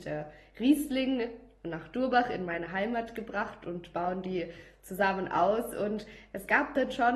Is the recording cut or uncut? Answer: uncut